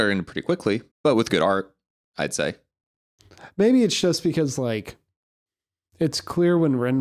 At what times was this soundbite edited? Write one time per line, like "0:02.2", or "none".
0:00.9

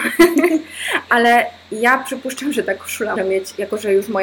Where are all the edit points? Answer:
0:03.2

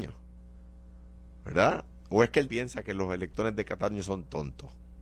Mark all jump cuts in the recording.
0:02.5

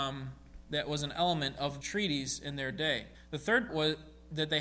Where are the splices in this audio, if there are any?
0:01.8
0:03.1
0:03.7

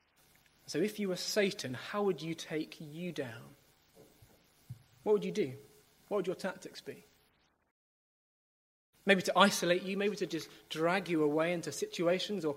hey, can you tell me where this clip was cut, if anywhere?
none

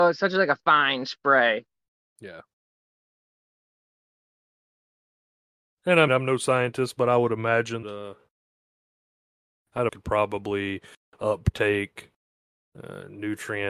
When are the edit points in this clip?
0:06.1
0:07.8
0:09.9

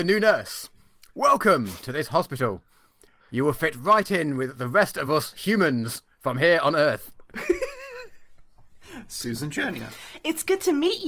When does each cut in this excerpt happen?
none

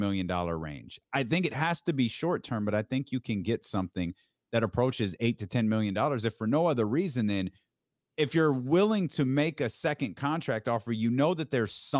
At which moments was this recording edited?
none

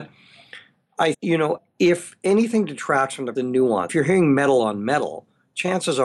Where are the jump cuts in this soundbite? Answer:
0:01.1
0:01.6
0:03.4
0:03.9

